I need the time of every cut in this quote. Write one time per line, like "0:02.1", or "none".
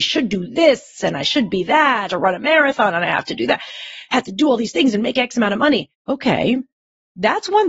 0:02.1
0:05.9